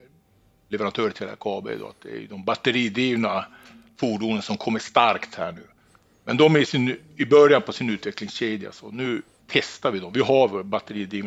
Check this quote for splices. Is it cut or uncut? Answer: uncut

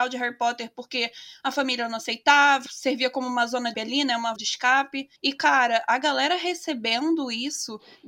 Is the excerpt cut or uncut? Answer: cut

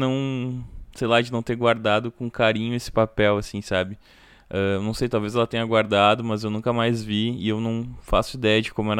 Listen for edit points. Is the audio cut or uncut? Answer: uncut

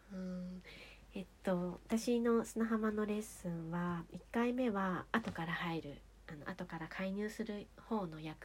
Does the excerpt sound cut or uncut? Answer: uncut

